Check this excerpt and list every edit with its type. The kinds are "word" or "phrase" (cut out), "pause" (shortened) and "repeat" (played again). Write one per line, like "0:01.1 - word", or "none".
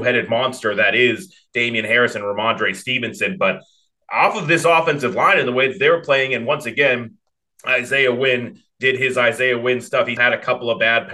0:10.2 - word